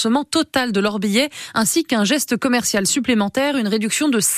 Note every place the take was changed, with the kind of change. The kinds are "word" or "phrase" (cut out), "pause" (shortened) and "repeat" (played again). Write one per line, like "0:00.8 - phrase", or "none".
none

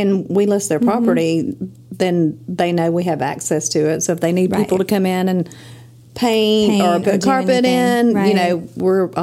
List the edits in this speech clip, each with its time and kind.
none

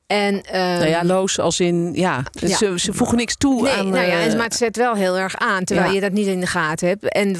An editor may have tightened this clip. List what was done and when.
none

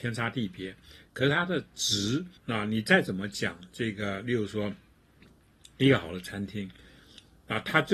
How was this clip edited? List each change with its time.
0:02.4 - pause

